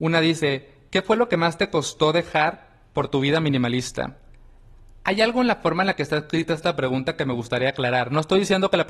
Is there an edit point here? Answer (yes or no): no